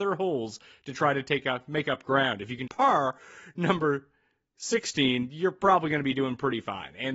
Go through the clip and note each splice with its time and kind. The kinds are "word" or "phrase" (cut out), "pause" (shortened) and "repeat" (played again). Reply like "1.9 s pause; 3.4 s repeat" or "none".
2.7 s word